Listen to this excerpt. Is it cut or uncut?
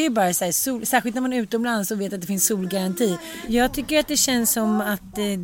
uncut